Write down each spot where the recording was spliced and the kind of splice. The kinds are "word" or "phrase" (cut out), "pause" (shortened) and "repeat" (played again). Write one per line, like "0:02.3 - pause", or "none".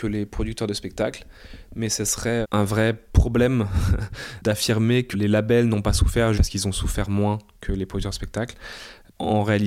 0:02.4 - word
0:05.1 - word
0:06.3 - word